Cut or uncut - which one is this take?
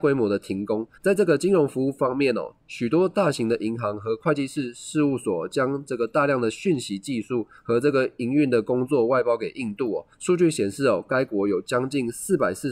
cut